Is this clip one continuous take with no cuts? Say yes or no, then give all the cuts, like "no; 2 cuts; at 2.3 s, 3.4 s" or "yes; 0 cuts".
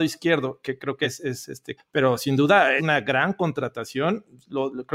no; 3 cuts; at 1.0 s, 1.8 s, 2.8 s